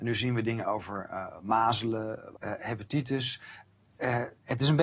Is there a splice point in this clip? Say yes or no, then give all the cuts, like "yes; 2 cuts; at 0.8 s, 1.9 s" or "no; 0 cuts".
yes; 1 cut; at 2.3 s